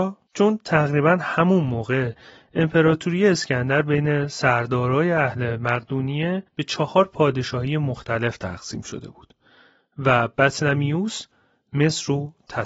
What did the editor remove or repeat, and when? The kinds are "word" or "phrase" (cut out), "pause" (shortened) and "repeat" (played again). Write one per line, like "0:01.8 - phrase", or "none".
0:06.5 - pause

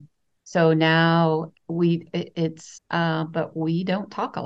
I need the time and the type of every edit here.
0:01.6 - word
0:02.8 - word

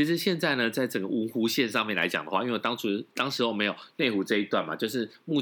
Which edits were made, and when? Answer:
none

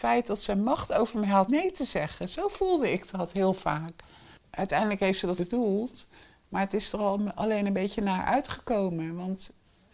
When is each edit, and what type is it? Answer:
0:01.5 - word
0:05.4 - word

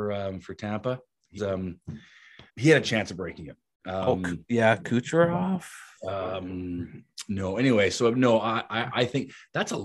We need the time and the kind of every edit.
0:01.4 - word
0:02.5 - word
0:06.0 - pause

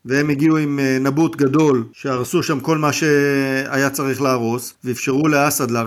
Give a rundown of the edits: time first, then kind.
none

